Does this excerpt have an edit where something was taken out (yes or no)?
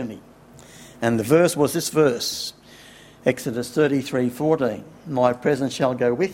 no